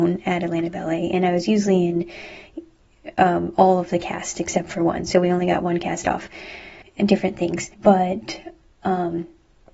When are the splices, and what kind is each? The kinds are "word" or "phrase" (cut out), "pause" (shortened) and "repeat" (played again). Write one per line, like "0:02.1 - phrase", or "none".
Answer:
0:06.8 - pause
0:07.7 - pause